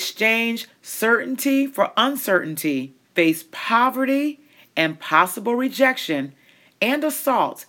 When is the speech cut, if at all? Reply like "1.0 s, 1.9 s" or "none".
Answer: 3.0 s